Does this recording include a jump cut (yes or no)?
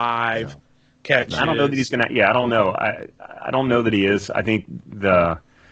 no